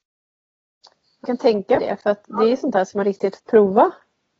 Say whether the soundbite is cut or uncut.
cut